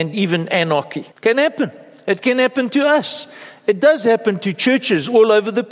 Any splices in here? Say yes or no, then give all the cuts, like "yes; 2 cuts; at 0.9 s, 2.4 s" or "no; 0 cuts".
yes; 1 cut; at 1.1 s